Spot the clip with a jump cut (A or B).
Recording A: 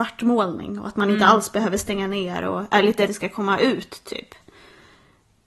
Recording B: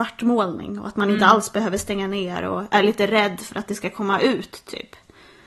A